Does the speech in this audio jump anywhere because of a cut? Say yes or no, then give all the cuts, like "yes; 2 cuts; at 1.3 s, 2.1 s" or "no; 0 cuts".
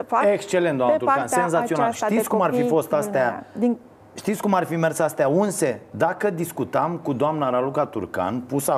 no; 0 cuts